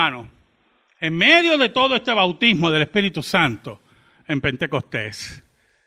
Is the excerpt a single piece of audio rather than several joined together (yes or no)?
yes